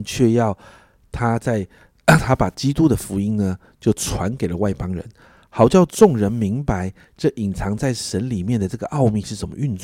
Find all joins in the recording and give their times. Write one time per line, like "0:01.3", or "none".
none